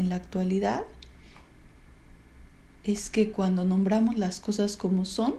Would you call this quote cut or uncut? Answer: uncut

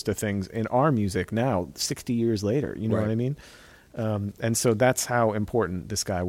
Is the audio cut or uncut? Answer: uncut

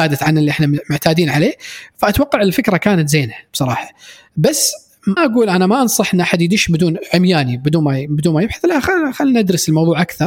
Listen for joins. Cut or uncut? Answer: cut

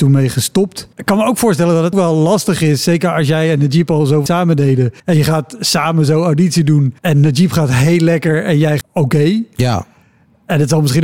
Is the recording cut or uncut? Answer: cut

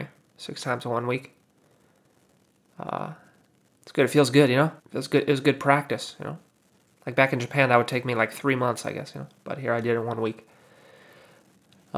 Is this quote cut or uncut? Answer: cut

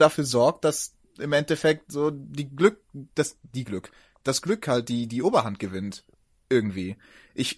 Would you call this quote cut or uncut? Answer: uncut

